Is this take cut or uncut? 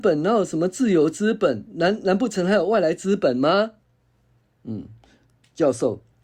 uncut